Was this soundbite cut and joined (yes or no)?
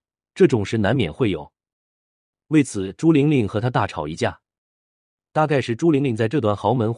no